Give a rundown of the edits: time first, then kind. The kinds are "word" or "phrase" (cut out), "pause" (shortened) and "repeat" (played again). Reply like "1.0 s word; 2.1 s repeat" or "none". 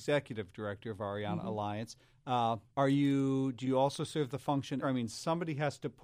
2.7 s pause; 4.8 s phrase